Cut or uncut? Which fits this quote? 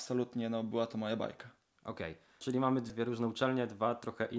uncut